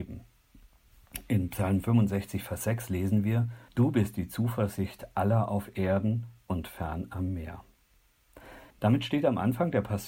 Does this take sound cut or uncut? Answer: cut